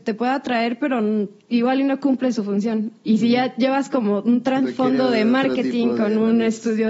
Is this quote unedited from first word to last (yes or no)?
yes